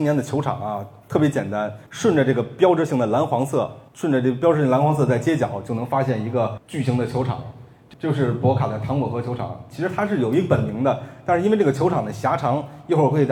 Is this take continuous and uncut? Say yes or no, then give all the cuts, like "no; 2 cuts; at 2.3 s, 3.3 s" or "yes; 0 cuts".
no; 2 cuts; at 1.9 s, 3.9 s